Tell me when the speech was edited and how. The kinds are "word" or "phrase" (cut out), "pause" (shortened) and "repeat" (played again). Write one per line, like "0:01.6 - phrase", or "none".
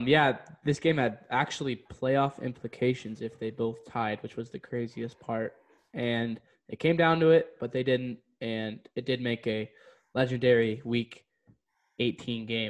none